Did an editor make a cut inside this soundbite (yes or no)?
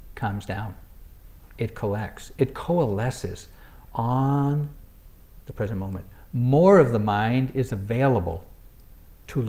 no